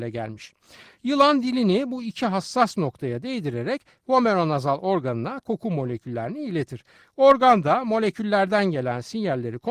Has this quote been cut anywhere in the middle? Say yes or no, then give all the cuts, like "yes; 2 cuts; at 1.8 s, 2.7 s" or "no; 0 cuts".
no; 0 cuts